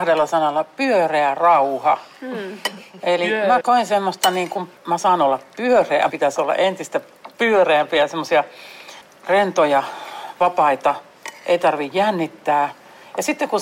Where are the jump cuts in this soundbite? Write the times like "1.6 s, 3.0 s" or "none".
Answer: 3.6 s, 4.8 s, 6.1 s